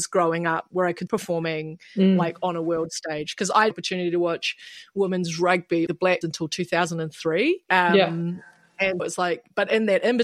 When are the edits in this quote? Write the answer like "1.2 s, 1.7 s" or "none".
1.1 s, 3.7 s, 5.9 s, 6.2 s, 7.6 s, 9.0 s